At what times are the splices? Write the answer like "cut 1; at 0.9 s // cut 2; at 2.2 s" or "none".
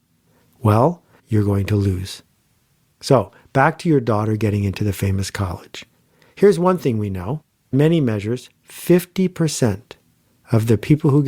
cut 1; at 1.2 s // cut 2; at 7.7 s